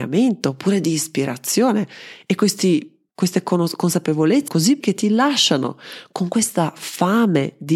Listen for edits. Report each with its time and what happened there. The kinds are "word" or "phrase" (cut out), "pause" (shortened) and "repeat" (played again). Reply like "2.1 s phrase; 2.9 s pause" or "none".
3.1 s pause; 4.5 s word; 4.8 s word